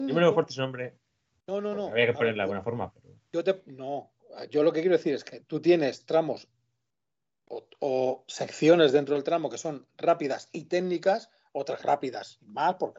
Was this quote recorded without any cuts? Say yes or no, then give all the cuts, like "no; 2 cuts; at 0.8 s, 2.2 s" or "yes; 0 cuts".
no; 1 cut; at 11.8 s